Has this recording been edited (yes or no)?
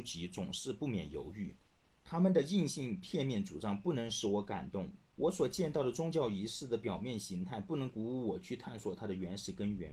yes